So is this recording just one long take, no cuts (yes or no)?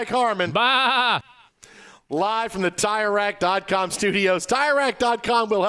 yes